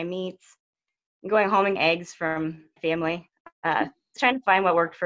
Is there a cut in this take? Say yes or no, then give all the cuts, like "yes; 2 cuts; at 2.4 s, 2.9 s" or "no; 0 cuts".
yes; 3 cuts; at 1.8 s, 2.8 s, 4.2 s